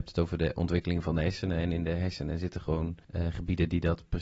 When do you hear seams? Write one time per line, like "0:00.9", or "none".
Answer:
0:03.0